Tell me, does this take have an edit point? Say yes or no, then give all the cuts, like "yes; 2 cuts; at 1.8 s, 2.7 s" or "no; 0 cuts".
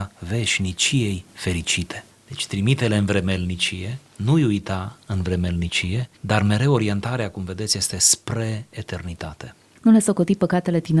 no; 0 cuts